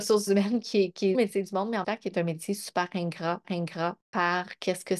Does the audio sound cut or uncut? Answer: cut